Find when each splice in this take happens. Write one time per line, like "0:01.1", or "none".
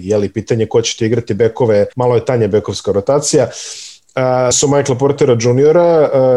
0:01.9
0:04.5